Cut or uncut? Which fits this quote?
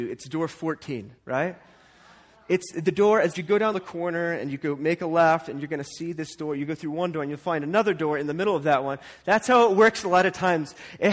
cut